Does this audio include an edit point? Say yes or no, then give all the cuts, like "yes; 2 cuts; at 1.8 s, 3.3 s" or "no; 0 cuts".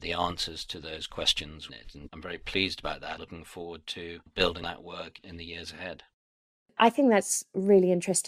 yes; 4 cuts; at 1.7 s, 2.1 s, 3.2 s, 4.6 s